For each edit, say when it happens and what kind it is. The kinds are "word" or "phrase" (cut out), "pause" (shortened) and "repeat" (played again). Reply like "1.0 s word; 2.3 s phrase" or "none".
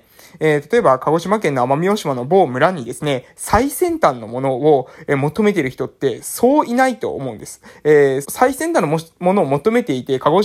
8.2 s phrase